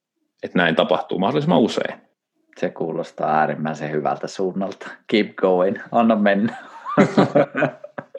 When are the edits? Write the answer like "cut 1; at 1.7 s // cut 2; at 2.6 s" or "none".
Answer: cut 1; at 2.1 s